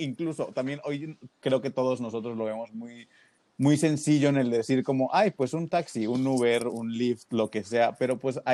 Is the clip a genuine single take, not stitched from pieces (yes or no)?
yes